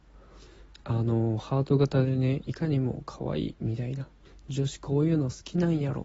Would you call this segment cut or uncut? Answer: cut